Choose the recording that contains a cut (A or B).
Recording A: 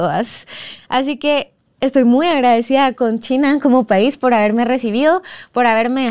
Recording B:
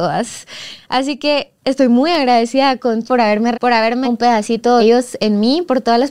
B